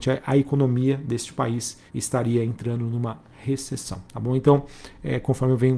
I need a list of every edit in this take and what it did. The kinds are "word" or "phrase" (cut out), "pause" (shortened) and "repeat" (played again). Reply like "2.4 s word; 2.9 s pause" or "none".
1.9 s pause; 4.1 s pause

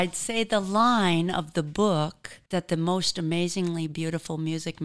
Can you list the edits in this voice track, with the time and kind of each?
2.5 s pause

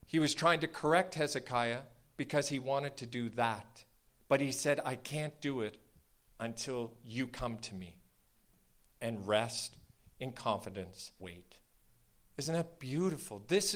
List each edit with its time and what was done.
11.2 s word

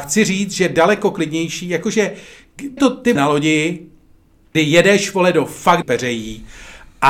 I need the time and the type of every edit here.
2.8 s phrase; 3.2 s word; 4.5 s word; 5.8 s word

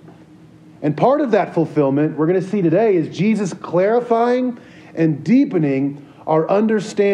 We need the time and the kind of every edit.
none

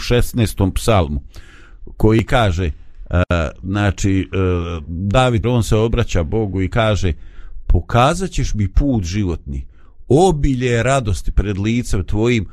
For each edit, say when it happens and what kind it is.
5.4 s phrase

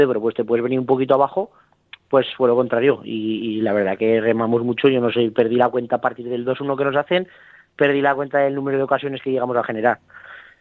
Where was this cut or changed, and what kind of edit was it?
none

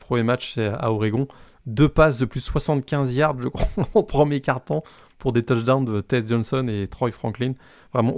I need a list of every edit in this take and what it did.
none

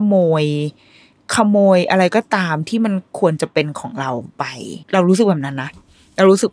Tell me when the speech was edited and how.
4.8 s pause

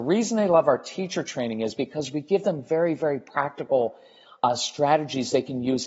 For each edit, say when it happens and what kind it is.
none

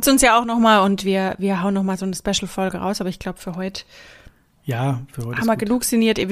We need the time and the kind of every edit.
none

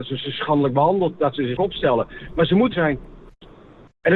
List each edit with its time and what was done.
1.6 s word; 2.7 s phrase

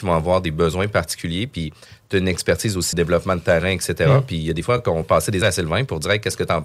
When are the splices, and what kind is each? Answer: 2.9 s phrase; 5.0 s word; 5.4 s word

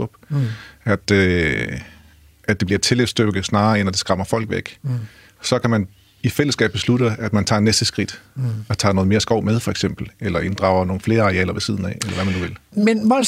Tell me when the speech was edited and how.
none

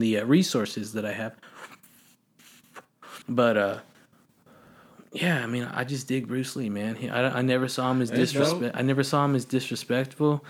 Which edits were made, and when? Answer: 3.2 s pause

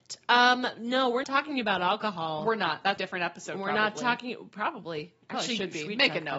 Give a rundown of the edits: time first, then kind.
1.2 s word; 3.0 s word; 5.2 s pause

